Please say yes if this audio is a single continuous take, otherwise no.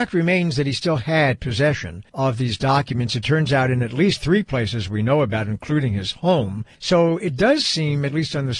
no